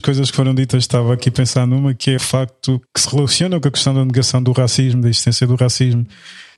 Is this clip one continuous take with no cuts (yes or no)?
no